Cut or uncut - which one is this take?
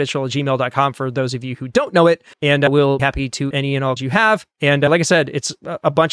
cut